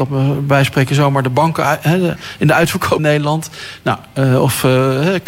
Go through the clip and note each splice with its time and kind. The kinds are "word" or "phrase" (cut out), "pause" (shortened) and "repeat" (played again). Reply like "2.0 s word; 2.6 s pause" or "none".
3.0 s phrase